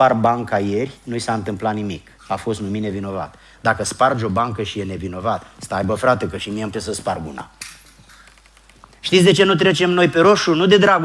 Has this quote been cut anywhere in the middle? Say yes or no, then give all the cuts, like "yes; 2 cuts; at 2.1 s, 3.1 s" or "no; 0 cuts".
yes; 1 cut; at 6.7 s